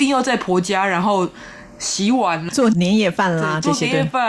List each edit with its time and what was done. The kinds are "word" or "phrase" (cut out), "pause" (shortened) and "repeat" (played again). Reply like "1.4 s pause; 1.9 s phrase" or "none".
2.5 s word